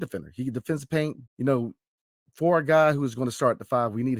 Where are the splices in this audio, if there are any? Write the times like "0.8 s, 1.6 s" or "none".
1.3 s